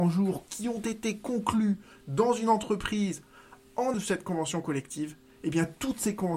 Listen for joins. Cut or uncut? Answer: cut